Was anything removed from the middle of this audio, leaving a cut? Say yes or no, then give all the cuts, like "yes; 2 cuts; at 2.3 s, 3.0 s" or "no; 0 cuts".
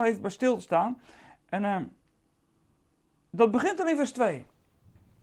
no; 0 cuts